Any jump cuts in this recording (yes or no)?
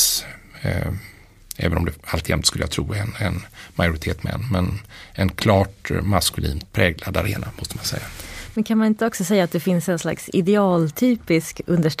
yes